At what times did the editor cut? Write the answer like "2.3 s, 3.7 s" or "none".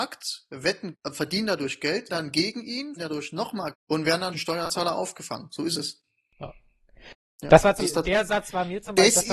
0.9 s, 2.1 s, 3.0 s, 3.7 s, 4.3 s, 7.8 s